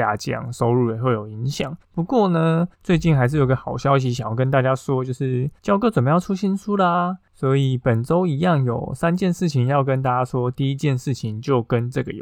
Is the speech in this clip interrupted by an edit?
yes; 2 cuts; at 2.7 s, 5.6 s

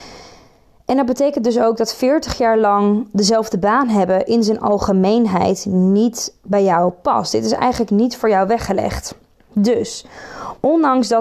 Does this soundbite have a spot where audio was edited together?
no; 0 cuts

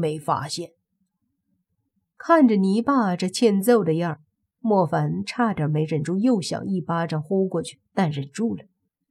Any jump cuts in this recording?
yes; 1 cut; at 7.9 s

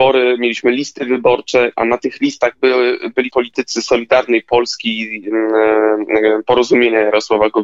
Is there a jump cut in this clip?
yes; 1 cut; at 3.3 s

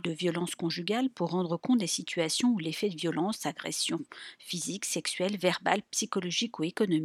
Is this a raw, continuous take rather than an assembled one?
yes; 0 cuts

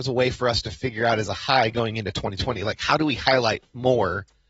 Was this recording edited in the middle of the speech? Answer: no; 0 cuts

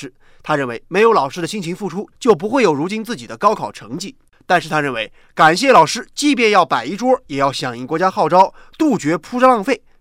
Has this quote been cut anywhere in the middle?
no; 0 cuts

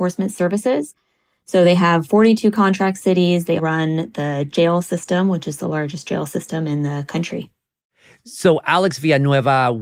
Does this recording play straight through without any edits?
no; 1 cut; at 3.6 s

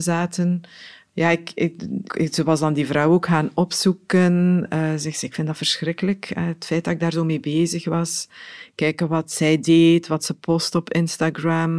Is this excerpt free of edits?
no; 1 cut; at 2.1 s

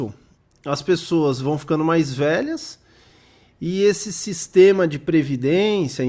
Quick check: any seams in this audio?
no; 0 cuts

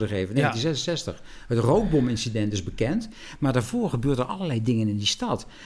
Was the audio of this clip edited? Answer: no; 0 cuts

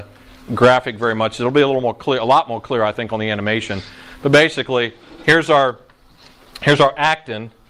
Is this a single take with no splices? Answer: yes; 0 cuts

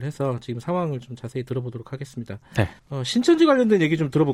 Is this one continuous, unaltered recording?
no; 1 cut; at 2.8 s

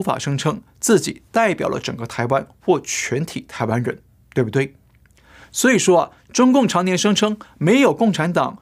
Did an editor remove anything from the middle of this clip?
no; 0 cuts

